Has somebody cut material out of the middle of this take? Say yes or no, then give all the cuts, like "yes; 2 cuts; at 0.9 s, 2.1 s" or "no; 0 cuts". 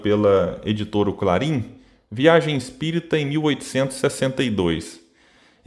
no; 0 cuts